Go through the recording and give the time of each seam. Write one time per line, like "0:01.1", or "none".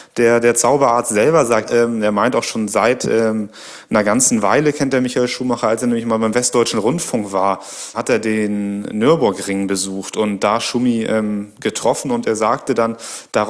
0:01.6
0:07.9